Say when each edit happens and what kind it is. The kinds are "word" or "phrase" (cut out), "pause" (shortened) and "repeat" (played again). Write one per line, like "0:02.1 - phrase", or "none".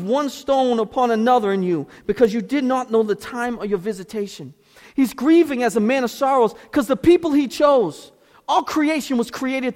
none